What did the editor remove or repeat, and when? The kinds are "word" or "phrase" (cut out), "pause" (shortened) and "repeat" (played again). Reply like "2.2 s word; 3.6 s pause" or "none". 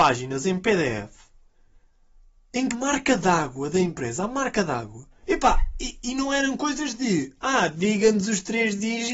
2.7 s phrase; 5.2 s pause